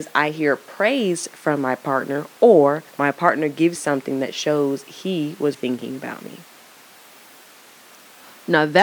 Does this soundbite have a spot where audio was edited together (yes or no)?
yes